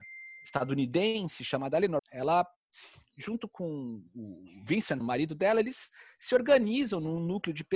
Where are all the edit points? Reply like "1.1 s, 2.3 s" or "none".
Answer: 2.0 s, 5.0 s